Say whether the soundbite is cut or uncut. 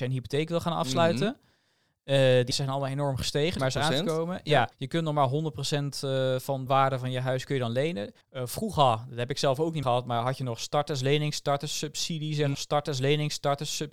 cut